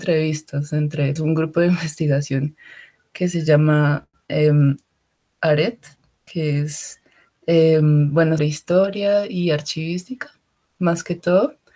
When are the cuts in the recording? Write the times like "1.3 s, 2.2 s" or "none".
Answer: 1.2 s, 8.4 s